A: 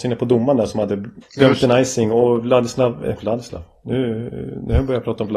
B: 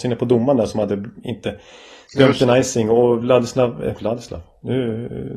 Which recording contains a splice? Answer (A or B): A